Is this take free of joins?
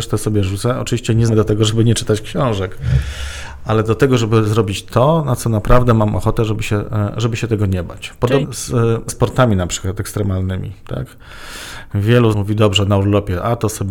no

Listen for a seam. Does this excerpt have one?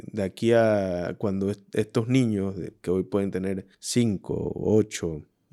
yes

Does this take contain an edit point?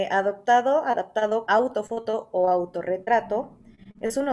yes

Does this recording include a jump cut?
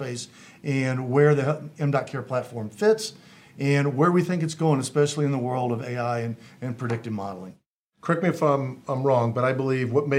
no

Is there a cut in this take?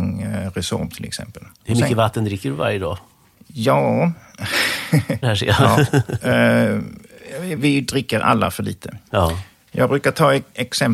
yes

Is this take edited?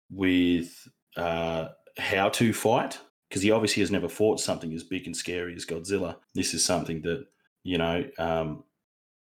yes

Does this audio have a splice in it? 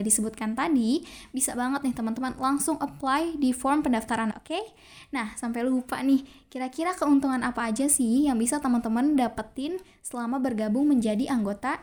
yes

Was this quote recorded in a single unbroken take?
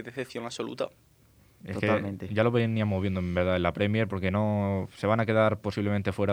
yes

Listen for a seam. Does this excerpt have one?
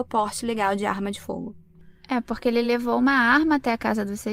no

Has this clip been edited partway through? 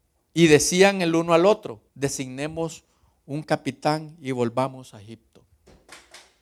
yes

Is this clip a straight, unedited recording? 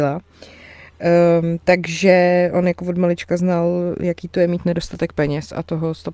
yes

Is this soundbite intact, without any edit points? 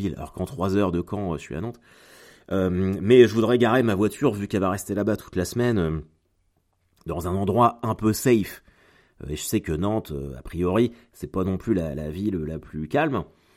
yes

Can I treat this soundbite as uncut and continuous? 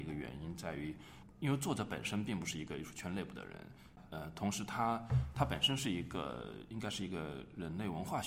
yes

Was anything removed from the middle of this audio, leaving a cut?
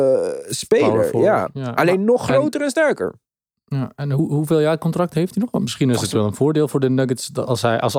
no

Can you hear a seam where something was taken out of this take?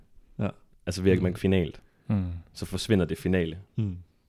yes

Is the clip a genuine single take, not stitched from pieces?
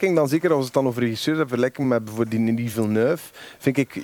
yes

